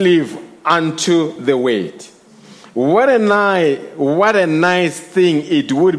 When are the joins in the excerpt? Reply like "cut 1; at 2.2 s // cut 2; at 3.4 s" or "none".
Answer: none